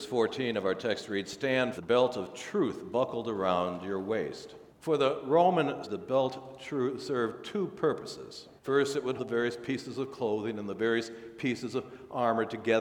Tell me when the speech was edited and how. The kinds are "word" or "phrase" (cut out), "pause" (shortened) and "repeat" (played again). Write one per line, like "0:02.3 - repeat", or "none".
0:01.7 - phrase
0:04.7 - pause
0:05.8 - word
0:08.6 - pause
0:09.2 - word